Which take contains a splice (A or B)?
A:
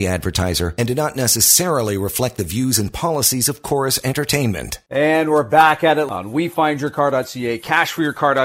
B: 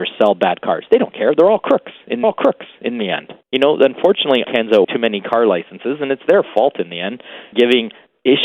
B